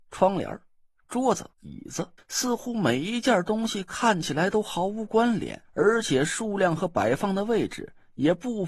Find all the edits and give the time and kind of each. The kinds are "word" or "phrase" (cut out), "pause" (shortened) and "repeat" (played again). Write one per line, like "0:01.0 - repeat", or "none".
0:01.5 - pause
0:02.2 - pause
0:05.6 - pause